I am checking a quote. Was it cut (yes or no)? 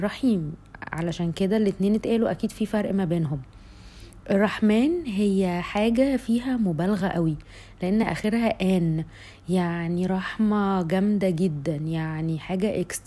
no